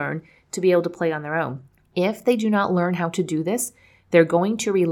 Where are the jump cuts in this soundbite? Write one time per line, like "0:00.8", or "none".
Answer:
none